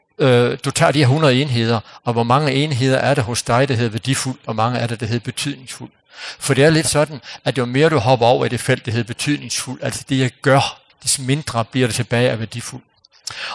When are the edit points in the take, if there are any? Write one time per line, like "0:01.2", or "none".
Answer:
0:10.9